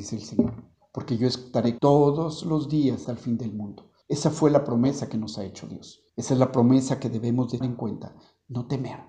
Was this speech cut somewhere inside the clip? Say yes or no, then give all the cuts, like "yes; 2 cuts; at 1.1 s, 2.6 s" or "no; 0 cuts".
yes; 5 cuts; at 1.8 s, 3.0 s, 4.0 s, 6.1 s, 7.6 s